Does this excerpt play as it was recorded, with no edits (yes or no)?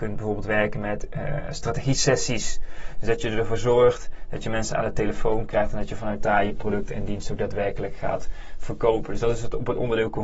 yes